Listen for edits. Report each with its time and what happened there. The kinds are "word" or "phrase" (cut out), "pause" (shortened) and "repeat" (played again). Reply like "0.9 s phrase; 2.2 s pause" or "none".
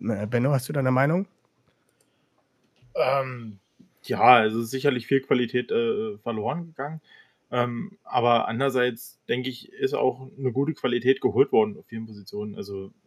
none